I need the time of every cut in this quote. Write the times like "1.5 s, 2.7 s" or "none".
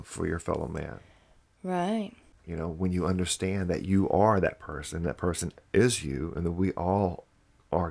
none